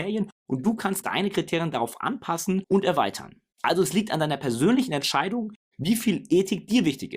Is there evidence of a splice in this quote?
yes; 1 cut; at 1.0 s

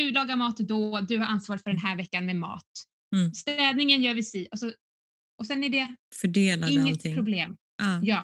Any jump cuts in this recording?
no; 0 cuts

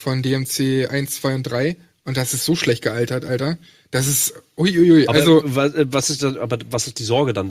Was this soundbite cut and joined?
no; 0 cuts

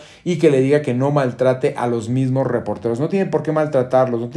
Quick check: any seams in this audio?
no; 0 cuts

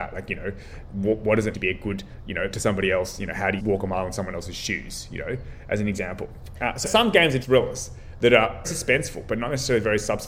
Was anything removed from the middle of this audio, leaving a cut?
yes; 6 cuts; at 1.5 s, 2.5 s, 3.6 s, 6.8 s, 7.4 s, 8.6 s

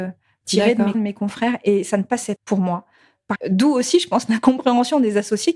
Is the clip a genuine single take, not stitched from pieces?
no; 3 cuts; at 0.9 s, 2.4 s, 3.3 s

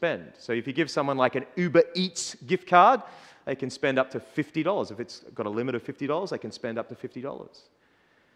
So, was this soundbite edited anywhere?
no; 0 cuts

